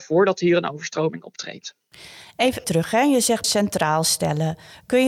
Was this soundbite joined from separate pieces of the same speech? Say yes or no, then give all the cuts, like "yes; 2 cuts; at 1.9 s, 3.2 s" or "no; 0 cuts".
yes; 2 cuts; at 2.6 s, 3.4 s